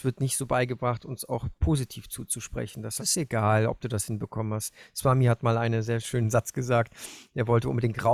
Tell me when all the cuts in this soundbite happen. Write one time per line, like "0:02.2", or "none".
0:03.0